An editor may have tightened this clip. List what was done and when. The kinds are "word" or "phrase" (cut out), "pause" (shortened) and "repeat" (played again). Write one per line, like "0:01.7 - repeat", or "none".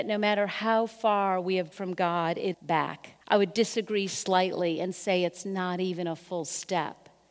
0:01.7 - word
0:02.5 - phrase
0:03.2 - pause